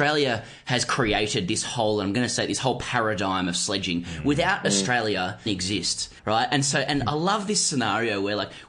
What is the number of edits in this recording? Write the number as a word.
two